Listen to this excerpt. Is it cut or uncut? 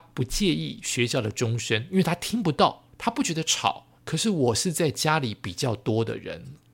cut